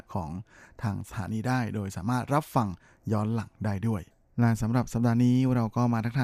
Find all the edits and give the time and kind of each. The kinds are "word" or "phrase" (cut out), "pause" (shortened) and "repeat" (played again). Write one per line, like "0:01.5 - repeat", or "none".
none